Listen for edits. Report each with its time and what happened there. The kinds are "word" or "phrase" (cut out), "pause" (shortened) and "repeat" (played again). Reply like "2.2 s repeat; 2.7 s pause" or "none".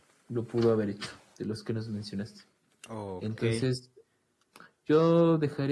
none